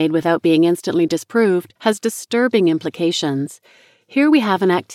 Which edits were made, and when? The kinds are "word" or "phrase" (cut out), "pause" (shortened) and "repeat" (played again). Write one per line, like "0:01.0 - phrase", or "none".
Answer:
0:01.8 - pause